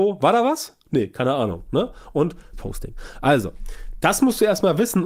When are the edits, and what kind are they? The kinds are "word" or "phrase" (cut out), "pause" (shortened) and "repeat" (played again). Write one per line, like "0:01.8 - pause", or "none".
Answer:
0:02.5 - word